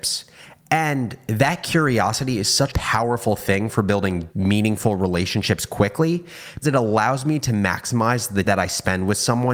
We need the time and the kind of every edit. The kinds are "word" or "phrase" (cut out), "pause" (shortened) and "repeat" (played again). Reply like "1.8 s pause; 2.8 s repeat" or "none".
2.7 s word; 4.3 s word; 6.6 s word; 8.4 s word